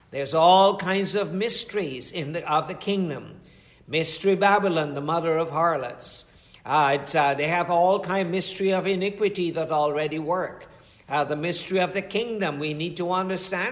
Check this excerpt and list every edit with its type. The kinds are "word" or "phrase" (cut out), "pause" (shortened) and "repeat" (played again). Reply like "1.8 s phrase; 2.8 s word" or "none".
none